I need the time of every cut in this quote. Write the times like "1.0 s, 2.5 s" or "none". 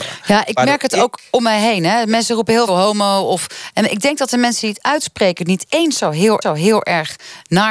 2.7 s, 6.4 s

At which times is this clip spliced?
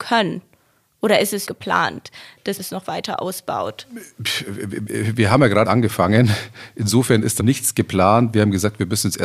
1.5 s, 2.6 s, 5.6 s, 7.4 s

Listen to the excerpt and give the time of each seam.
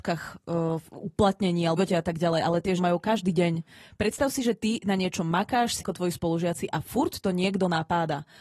1.8 s, 2.8 s, 5.8 s

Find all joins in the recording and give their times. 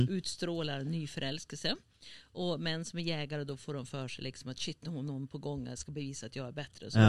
none

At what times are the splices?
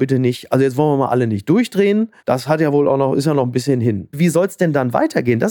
2.2 s

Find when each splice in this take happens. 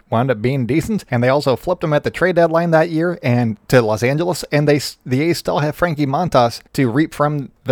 6.7 s

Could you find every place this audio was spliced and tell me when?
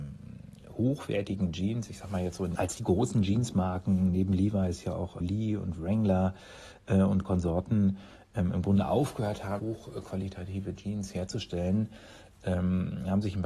2.6 s, 5.2 s, 9.6 s

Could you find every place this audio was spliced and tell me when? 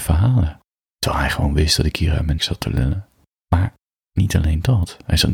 2.4 s, 3.9 s

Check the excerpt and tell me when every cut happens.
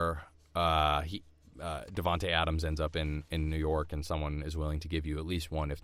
none

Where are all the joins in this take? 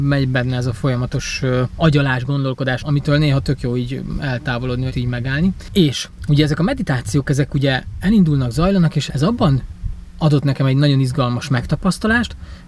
2.8 s, 4.9 s, 9.1 s

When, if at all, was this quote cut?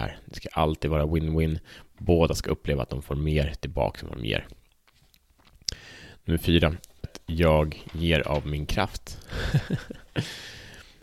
7.0 s, 10.1 s

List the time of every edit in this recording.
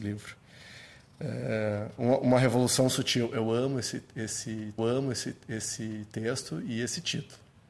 4.8 s

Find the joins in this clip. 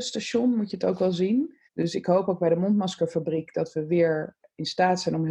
1.7 s

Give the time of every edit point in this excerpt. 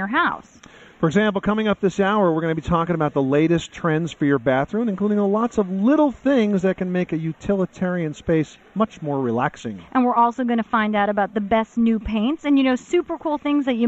none

